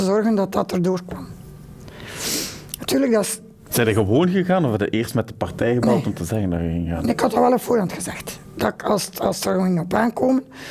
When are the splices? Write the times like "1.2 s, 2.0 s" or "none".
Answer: none